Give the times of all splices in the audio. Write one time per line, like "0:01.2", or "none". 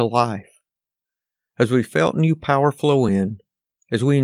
none